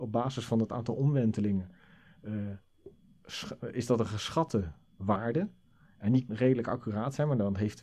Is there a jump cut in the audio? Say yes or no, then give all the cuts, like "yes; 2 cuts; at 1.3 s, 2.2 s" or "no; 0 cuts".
yes; 1 cut; at 6.3 s